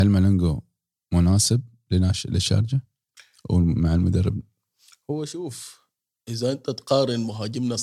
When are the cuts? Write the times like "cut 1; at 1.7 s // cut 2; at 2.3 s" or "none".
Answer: none